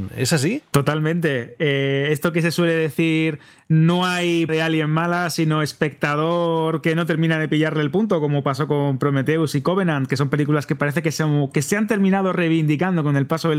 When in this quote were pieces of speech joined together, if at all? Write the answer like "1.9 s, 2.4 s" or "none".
4.5 s